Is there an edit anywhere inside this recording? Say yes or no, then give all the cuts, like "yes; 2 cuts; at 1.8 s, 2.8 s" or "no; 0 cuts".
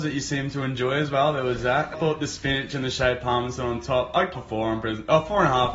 yes; 2 cuts; at 1.9 s, 4.3 s